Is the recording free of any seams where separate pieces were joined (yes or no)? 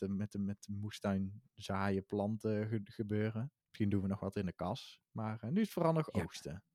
no